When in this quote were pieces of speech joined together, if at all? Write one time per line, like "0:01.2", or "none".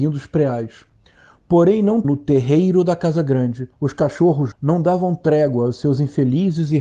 0:02.0
0:03.7
0:04.5